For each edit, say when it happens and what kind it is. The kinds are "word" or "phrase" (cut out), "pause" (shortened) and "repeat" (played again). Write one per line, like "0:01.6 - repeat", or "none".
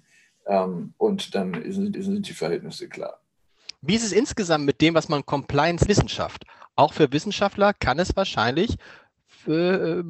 0:01.9 - repeat
0:05.9 - phrase